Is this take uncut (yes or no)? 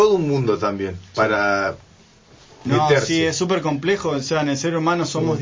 yes